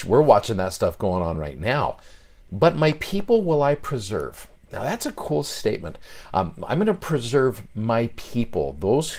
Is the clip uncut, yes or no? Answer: yes